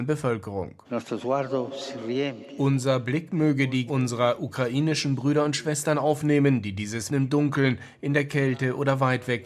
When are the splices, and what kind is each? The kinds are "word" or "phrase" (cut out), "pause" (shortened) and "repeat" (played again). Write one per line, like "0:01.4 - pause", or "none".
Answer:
0:03.9 - word
0:07.1 - word